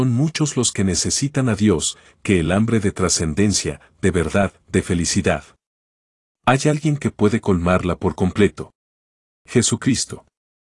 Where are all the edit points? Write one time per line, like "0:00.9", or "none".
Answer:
none